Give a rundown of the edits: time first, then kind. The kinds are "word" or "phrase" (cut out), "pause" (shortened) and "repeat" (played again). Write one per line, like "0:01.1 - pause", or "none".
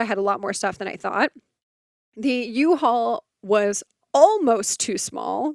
none